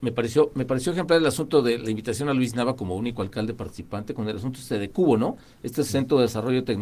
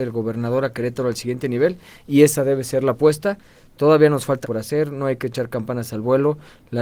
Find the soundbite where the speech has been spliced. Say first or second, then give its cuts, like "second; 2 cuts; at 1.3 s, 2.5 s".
second; 1 cut; at 4.4 s